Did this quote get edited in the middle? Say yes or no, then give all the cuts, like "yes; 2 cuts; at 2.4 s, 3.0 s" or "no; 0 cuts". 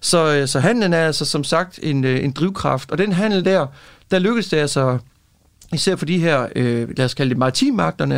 no; 0 cuts